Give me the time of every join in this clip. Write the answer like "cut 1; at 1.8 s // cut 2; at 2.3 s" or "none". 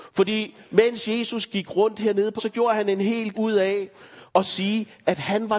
cut 1; at 2.4 s // cut 2; at 3.3 s // cut 3; at 4.3 s